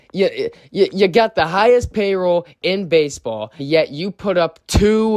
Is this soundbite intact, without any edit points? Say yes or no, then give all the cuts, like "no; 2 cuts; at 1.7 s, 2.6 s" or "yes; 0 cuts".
no; 1 cut; at 3.6 s